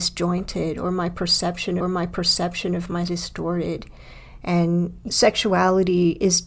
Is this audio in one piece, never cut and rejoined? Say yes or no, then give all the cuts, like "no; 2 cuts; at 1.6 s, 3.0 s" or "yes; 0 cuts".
no; 3 cuts; at 1.8 s, 3.1 s, 5.1 s